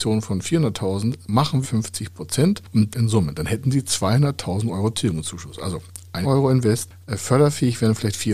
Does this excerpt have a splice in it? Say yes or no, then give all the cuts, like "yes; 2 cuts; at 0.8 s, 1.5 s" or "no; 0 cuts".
yes; 3 cuts; at 1.6 s, 2.9 s, 6.2 s